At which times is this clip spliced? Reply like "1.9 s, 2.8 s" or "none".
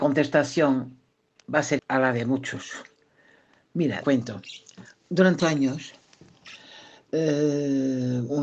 1.8 s, 4.0 s, 5.4 s